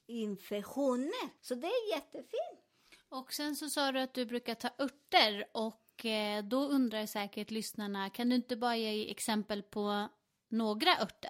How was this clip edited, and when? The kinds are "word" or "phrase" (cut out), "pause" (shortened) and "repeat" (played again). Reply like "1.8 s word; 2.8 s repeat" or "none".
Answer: 1.4 s pause